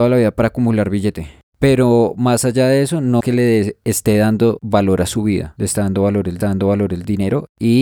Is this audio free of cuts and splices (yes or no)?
no